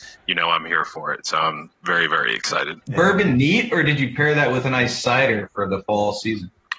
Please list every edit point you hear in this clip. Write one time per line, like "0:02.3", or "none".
0:02.8